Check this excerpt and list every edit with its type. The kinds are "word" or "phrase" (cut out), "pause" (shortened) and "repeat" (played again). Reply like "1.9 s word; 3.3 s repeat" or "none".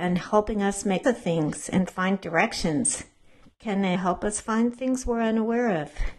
1.0 s word; 3.4 s pause; 3.9 s word